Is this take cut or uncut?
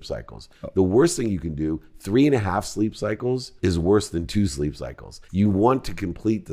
cut